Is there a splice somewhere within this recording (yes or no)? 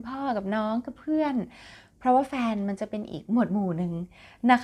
no